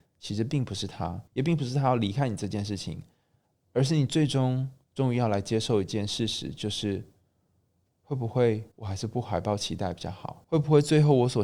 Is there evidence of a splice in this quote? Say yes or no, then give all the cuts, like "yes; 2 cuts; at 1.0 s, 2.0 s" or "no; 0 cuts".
yes; 3 cuts; at 1.3 s, 8.7 s, 10.4 s